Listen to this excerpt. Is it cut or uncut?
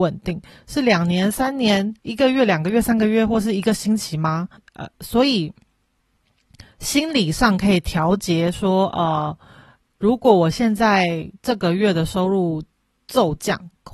cut